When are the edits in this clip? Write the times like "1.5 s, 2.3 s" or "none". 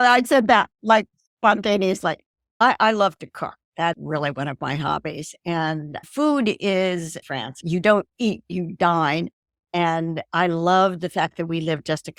3.9 s, 7.2 s